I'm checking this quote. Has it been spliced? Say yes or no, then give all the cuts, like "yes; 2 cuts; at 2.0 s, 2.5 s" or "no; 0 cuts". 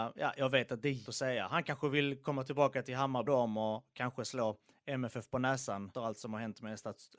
yes; 3 cuts; at 1.0 s, 3.3 s, 5.9 s